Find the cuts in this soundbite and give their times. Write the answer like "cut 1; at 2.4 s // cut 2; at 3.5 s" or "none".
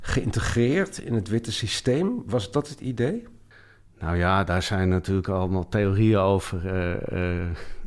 none